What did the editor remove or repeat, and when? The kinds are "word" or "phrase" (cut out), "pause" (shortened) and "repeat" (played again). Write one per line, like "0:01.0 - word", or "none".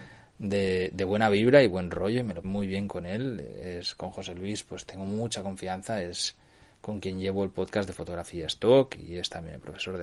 0:02.4 - word